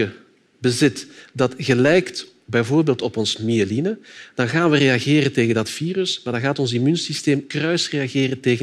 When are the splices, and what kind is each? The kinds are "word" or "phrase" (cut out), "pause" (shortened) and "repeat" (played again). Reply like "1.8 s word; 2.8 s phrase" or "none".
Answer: none